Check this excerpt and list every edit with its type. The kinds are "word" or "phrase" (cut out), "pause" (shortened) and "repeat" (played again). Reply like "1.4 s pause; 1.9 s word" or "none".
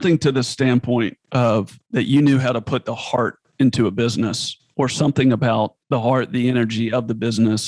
1.8 s pause; 5.8 s pause